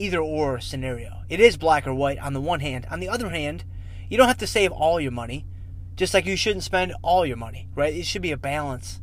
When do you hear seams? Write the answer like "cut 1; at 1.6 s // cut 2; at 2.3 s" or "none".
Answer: none